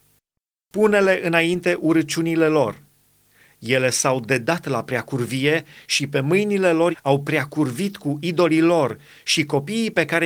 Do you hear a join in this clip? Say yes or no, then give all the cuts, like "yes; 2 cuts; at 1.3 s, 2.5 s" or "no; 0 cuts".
yes; 1 cut; at 6.9 s